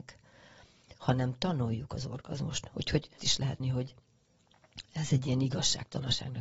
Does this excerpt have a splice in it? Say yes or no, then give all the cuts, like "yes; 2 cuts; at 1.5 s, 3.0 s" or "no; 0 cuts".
yes; 2 cuts; at 3.2 s, 3.6 s